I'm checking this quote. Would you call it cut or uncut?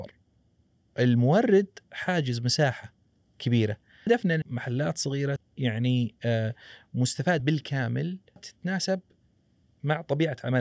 cut